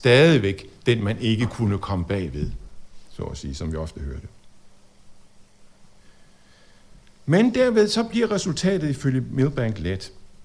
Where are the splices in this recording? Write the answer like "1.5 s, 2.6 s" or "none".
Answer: none